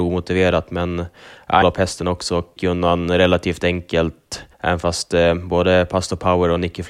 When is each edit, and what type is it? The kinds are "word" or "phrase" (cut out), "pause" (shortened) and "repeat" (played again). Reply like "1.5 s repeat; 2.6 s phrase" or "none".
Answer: 1.6 s phrase; 2.6 s word; 4.5 s pause